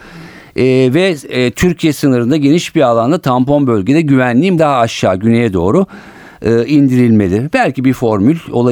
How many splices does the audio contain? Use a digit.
1